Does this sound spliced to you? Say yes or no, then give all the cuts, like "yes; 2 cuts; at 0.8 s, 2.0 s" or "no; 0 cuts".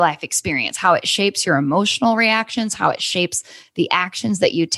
no; 0 cuts